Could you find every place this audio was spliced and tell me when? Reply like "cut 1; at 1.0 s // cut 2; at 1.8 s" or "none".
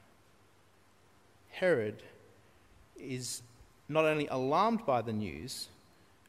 none